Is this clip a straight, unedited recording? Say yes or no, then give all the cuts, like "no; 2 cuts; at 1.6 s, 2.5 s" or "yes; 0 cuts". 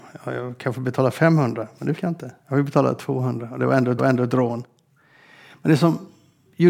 no; 3 cuts; at 2.0 s, 2.4 s, 4.0 s